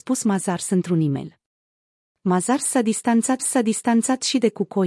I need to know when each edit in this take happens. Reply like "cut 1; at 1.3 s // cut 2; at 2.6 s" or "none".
cut 1; at 3.4 s